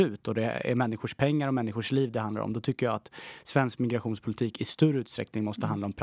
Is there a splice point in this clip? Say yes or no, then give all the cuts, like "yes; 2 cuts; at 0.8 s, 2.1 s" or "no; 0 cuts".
no; 0 cuts